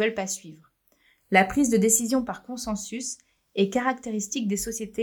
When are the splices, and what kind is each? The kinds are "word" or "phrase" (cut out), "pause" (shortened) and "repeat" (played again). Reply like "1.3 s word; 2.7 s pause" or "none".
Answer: none